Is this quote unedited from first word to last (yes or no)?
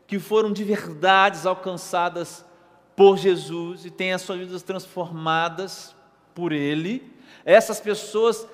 yes